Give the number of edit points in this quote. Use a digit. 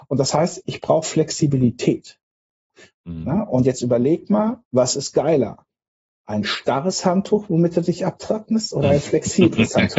1